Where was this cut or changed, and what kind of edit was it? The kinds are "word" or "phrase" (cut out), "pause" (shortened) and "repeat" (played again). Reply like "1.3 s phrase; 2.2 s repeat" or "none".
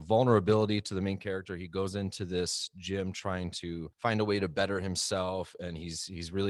3.9 s pause